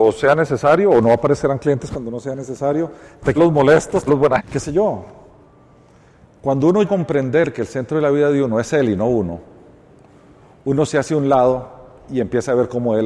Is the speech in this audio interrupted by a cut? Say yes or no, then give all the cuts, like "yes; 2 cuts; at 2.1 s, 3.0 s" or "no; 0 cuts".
yes; 4 cuts; at 3.4 s, 4.1 s, 4.4 s, 6.8 s